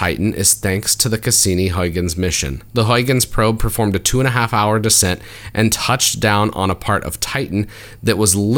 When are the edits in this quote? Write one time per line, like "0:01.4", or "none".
0:02.7